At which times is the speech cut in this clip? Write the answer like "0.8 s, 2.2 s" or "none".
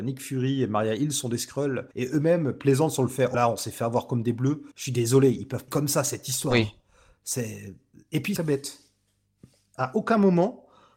1.9 s, 3.3 s, 4.7 s, 5.7 s, 8.4 s